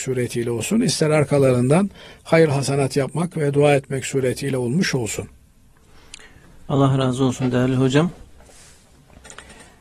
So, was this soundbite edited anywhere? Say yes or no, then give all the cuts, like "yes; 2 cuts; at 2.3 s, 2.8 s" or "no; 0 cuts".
no; 0 cuts